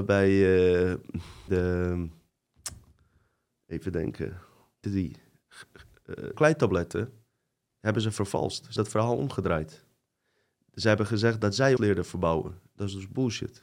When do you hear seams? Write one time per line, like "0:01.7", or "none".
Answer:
0:01.5
0:04.8
0:06.3
0:08.8
0:11.8